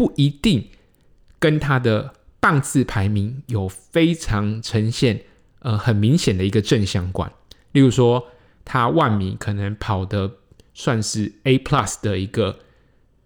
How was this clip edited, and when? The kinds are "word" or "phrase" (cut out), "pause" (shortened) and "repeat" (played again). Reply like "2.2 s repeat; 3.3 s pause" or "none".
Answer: none